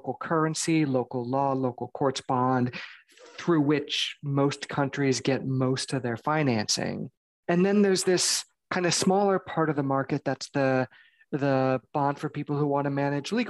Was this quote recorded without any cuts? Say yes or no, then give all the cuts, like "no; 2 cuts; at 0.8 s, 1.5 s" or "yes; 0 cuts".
yes; 0 cuts